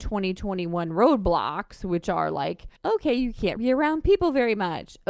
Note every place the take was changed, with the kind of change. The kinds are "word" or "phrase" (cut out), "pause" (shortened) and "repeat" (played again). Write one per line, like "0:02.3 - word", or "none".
0:02.8 - pause
0:03.6 - word